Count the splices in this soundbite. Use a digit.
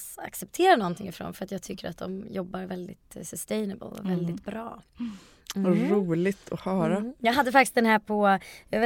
0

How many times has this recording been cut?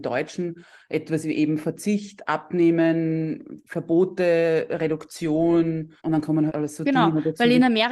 2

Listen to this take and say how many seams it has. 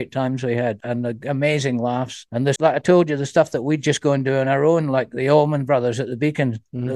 1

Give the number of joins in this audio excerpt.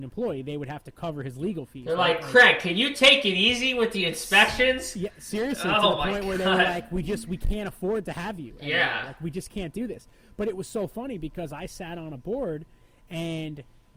0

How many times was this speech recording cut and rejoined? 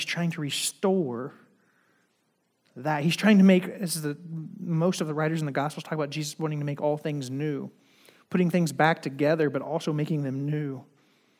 0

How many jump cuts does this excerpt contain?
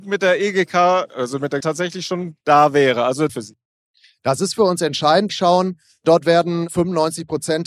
4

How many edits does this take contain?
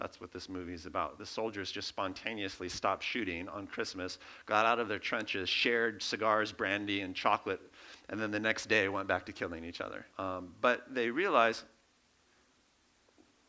1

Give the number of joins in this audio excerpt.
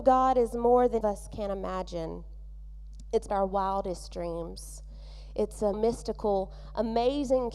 3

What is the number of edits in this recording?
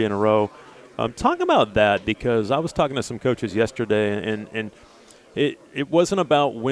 0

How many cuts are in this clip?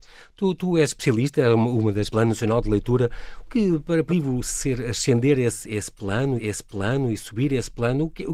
4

